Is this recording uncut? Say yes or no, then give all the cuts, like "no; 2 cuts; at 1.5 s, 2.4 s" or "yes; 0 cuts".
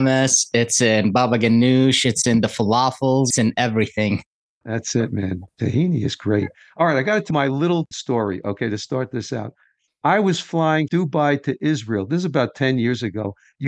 no; 4 cuts; at 3.3 s, 7.3 s, 7.9 s, 10.9 s